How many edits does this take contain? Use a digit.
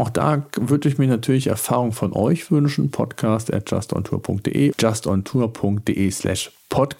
1